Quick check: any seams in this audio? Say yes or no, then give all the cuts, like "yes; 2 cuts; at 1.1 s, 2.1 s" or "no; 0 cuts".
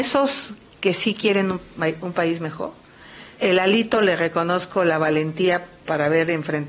yes; 1 cut; at 3.3 s